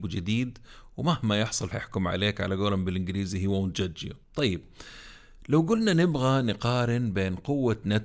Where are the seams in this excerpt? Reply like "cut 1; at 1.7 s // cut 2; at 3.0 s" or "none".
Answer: cut 1; at 1.7 s // cut 2; at 4.2 s